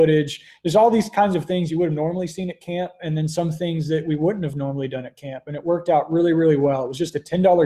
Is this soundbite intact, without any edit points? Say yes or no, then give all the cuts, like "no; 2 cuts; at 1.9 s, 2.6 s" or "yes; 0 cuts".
yes; 0 cuts